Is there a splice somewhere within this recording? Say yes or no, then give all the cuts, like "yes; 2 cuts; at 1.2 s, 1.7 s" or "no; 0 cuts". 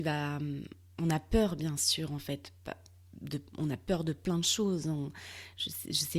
yes; 1 cut; at 3.5 s